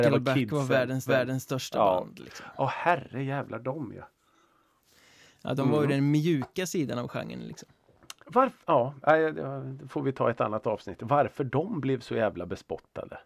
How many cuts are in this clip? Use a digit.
2